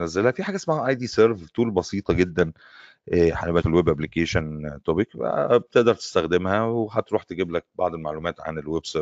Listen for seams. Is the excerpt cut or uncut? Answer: cut